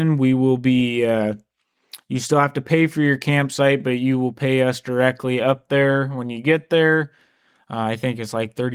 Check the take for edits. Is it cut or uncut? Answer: uncut